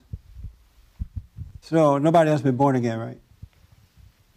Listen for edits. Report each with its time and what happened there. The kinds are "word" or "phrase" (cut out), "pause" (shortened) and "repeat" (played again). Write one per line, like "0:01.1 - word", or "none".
0:01.6 - pause